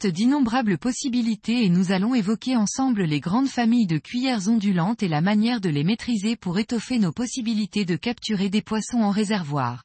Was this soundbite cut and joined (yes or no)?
no